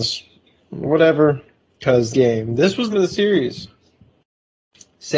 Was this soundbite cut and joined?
yes; 2 cuts; at 2.1 s, 2.9 s

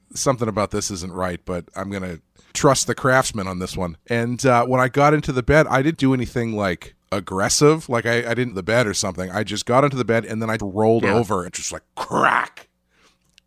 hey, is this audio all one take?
no; 7 cuts; at 2.5 s, 4.0 s, 5.9 s, 7.0 s, 8.5 s, 10.6 s, 11.5 s

